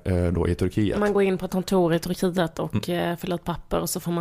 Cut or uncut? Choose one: cut